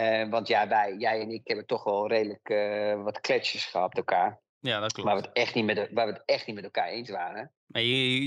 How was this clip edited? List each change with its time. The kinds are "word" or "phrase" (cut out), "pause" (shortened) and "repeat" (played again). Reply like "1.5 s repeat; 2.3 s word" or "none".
3.9 s word